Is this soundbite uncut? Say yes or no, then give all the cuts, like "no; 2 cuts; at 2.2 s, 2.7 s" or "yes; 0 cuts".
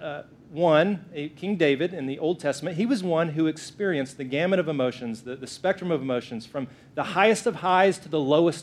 yes; 0 cuts